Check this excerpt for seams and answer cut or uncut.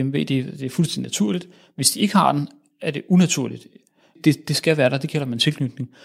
uncut